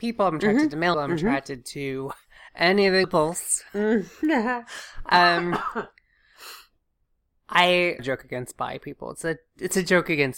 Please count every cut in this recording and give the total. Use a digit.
3